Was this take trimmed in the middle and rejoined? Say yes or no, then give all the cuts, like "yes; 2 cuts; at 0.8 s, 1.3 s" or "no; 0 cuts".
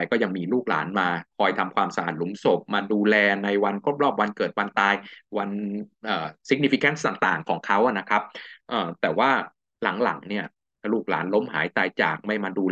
yes; 1 cut; at 1.3 s